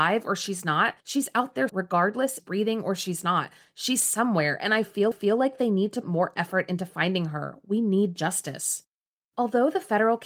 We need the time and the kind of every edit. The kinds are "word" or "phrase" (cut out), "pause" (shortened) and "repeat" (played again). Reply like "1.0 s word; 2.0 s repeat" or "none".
1.0 s pause; 1.7 s word; 2.4 s phrase; 5.1 s repeat; 6.0 s word; 9.1 s pause